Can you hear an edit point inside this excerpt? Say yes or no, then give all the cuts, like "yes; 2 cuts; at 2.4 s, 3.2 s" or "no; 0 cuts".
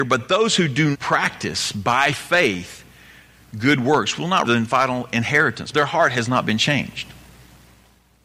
yes; 3 cuts; at 0.9 s, 4.4 s, 5.7 s